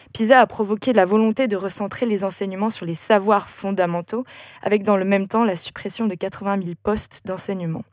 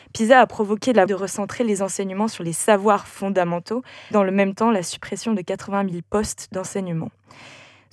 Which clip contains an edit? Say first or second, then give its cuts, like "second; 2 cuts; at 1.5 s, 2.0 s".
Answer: second; 2 cuts; at 1.1 s, 4.1 s